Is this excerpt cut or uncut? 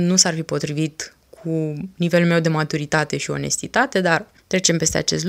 uncut